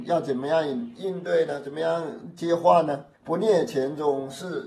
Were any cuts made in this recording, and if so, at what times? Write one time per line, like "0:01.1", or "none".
0:03.1